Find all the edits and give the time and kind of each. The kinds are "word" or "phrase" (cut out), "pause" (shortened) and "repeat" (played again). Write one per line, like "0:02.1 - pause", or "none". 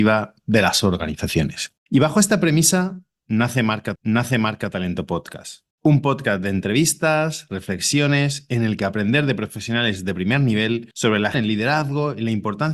0:01.8 - pause
0:04.0 - repeat
0:05.7 - pause
0:11.3 - word